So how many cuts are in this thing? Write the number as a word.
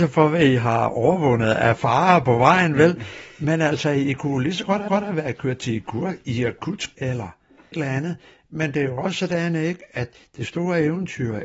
three